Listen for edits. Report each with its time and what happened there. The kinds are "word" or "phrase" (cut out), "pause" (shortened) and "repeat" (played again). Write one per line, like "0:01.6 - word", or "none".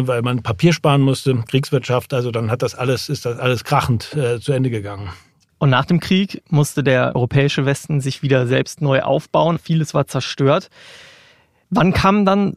none